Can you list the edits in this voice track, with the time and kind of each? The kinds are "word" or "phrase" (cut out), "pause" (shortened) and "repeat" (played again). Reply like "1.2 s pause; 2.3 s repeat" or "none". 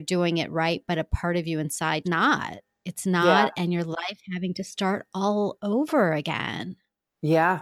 2.0 s phrase

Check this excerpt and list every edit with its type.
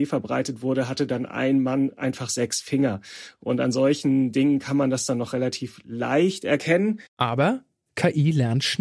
7.1 s pause

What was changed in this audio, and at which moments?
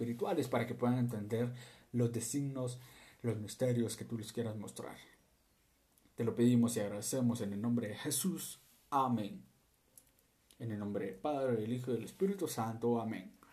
none

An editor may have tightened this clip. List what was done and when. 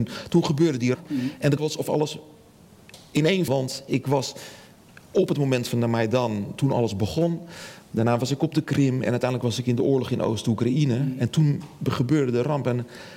0.9 s word; 1.6 s word; 3.5 s word

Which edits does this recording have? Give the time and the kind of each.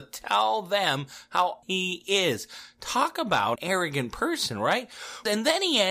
1.6 s word; 3.6 s word

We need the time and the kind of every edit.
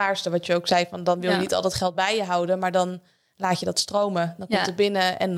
none

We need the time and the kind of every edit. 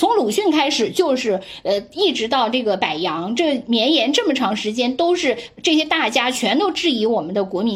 none

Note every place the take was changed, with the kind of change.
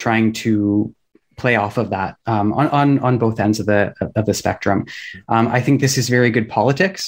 none

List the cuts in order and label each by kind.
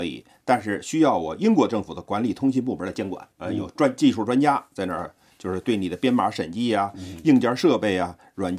3.3 s pause

